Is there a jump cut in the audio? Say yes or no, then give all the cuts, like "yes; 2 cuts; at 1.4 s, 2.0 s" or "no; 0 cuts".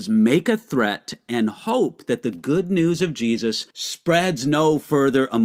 yes; 1 cut; at 3.7 s